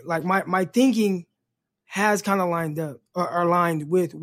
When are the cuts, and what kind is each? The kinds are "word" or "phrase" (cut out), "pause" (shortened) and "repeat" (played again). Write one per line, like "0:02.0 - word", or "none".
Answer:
0:03.1 - pause